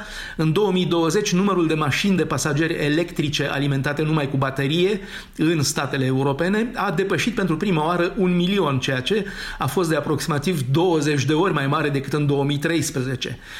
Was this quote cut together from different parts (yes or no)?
no